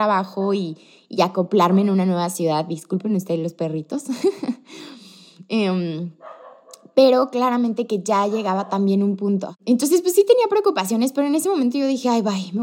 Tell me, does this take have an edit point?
no; 0 cuts

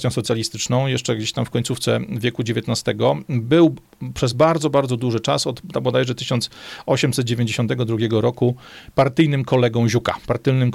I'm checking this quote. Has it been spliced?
no; 0 cuts

